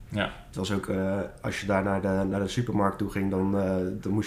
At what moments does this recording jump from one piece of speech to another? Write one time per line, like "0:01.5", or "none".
none